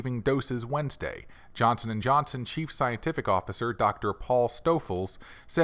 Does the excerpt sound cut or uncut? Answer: uncut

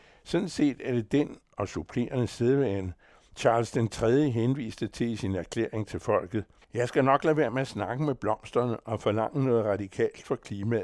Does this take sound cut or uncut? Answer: cut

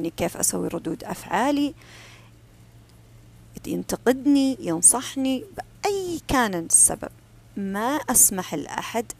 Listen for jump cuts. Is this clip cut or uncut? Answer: uncut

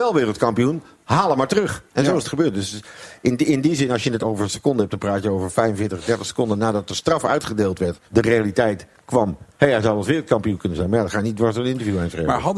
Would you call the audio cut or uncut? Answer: cut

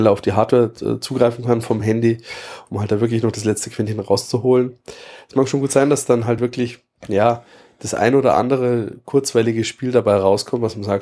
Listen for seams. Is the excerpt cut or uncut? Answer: uncut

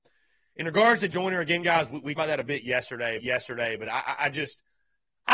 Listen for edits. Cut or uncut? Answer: cut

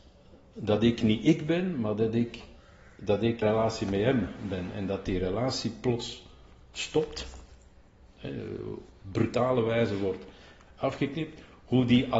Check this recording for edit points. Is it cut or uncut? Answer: cut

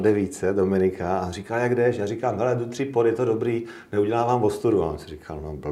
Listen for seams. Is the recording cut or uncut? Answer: uncut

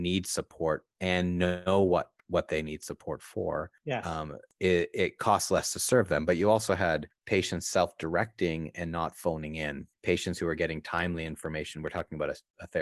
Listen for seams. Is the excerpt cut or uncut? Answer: cut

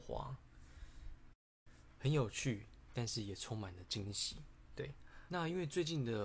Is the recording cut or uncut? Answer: cut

